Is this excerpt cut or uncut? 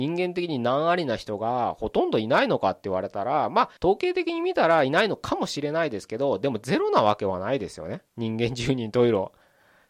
cut